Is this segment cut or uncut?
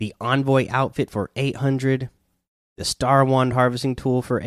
uncut